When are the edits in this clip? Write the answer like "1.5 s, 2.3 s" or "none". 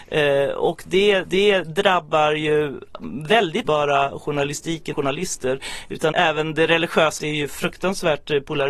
1.2 s, 3.6 s, 4.9 s, 6.1 s, 7.2 s